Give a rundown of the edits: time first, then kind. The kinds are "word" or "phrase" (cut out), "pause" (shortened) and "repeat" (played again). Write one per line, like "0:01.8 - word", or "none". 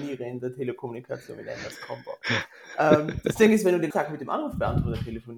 0:03.9 - word